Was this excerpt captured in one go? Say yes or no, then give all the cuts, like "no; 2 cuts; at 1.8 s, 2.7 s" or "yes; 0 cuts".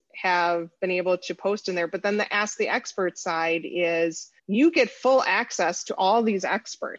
no; 1 cut; at 4.4 s